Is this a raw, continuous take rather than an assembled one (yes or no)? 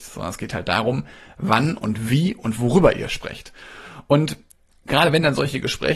yes